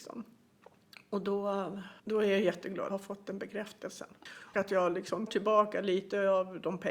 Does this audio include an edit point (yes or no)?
yes